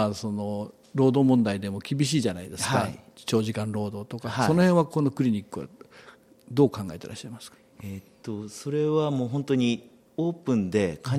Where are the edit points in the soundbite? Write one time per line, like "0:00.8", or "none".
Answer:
none